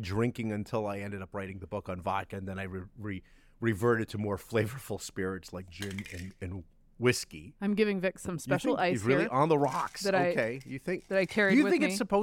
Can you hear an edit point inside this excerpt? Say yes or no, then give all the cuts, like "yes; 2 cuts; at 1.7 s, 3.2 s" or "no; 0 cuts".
no; 0 cuts